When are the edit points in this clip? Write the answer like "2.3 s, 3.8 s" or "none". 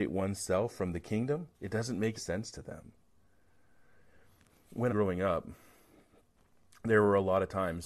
1.5 s, 2.2 s, 4.9 s